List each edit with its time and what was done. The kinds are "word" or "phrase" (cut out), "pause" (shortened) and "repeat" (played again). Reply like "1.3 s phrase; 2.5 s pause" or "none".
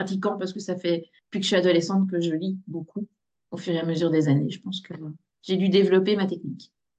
none